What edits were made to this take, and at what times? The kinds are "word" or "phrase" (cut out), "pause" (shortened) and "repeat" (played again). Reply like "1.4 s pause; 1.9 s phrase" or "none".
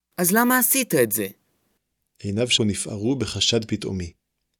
2.6 s word